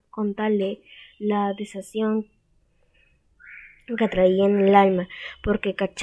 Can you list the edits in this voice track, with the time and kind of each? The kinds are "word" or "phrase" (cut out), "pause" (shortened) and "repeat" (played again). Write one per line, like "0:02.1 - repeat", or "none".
none